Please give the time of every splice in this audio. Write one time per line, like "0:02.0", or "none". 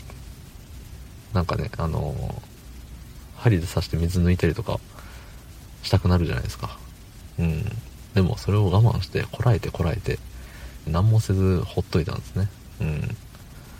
0:10.9